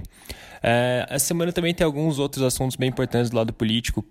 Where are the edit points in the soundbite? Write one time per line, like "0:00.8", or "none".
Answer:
none